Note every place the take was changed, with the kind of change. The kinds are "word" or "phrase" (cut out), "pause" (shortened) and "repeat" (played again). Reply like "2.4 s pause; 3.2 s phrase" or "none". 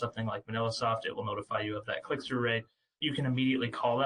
none